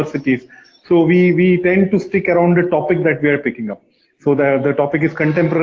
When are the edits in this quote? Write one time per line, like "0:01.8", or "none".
none